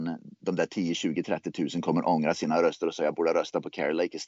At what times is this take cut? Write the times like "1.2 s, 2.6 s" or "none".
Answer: none